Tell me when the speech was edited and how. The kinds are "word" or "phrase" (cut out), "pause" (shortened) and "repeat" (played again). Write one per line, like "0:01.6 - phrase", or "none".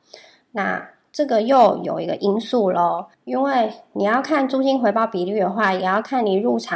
0:03.1 - pause